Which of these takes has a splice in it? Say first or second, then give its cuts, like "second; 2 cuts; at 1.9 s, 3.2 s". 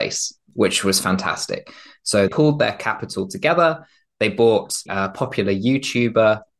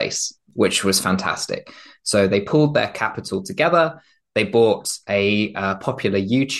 first; 2 cuts; at 2.3 s, 4.9 s